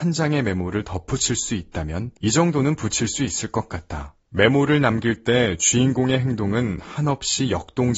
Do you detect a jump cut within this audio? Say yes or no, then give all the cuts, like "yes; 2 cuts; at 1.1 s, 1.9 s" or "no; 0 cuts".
yes; 2 cuts; at 2.2 s, 4.2 s